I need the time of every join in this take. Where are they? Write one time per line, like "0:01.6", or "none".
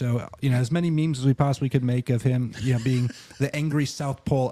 none